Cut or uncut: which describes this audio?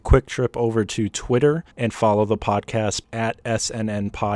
cut